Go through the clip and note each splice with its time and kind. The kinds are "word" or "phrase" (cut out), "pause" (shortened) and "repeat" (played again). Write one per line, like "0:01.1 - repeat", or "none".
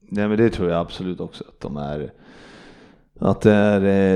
none